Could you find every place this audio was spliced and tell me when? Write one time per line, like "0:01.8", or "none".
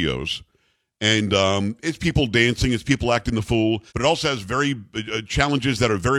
0:03.9